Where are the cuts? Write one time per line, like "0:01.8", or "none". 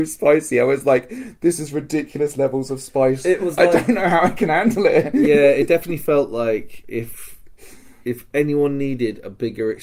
none